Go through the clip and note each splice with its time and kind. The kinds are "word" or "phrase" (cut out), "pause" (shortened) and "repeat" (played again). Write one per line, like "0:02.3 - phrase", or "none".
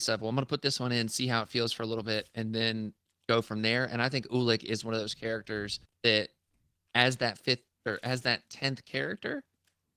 0:03.0 - pause
0:05.8 - pause
0:07.7 - pause